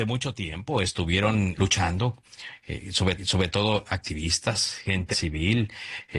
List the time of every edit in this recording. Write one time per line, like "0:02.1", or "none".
0:01.6
0:03.2
0:05.1